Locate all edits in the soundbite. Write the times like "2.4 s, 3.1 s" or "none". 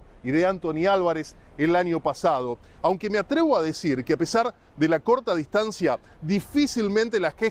none

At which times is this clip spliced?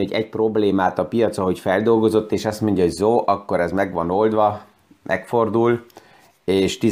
none

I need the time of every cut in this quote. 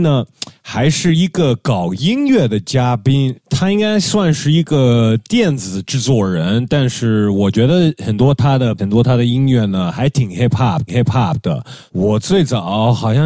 8.8 s, 10.9 s

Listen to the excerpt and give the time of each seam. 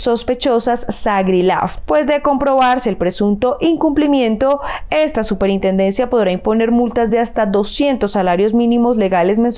none

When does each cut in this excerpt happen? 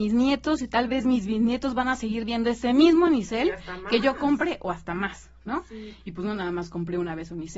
none

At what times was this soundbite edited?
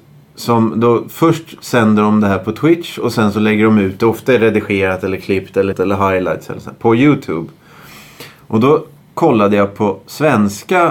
5.7 s

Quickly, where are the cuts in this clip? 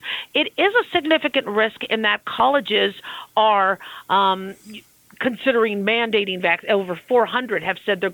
none

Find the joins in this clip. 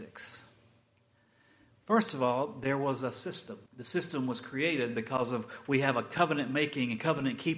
3.7 s

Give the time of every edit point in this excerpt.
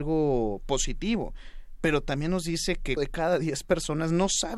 3.0 s

